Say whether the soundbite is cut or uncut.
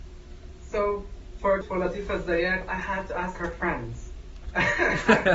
cut